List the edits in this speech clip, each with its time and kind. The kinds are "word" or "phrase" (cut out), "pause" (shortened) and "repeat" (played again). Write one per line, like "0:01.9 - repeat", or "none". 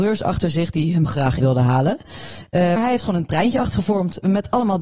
0:01.0 - word
0:01.4 - word
0:02.8 - word
0:03.7 - word